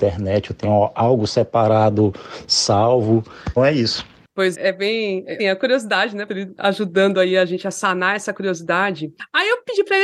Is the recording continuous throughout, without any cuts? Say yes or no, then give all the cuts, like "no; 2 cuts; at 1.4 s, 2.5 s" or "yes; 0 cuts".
no; 4 cuts; at 3.6 s, 4.5 s, 5.4 s, 6.3 s